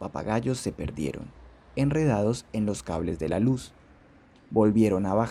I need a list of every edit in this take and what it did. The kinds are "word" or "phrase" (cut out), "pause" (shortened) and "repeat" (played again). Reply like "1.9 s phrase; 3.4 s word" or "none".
none